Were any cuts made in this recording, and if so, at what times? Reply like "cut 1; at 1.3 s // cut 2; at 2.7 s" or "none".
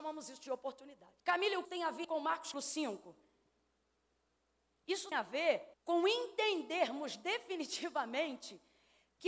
cut 1; at 1.2 s // cut 2; at 1.6 s // cut 3; at 2.0 s // cut 4; at 2.5 s // cut 5; at 5.1 s // cut 6; at 5.7 s